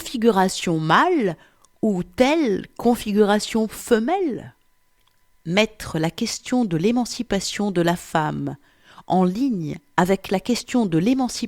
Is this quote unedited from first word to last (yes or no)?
yes